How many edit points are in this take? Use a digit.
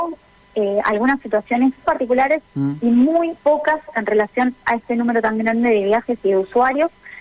2